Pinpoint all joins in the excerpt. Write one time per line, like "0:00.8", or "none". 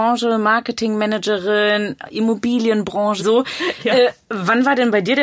0:03.2